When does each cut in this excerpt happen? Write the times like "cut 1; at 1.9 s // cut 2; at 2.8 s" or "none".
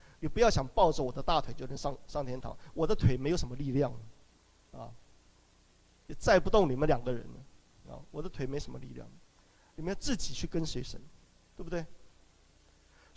none